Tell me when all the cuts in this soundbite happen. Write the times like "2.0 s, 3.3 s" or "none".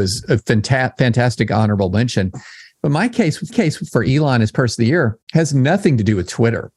3.5 s, 5.2 s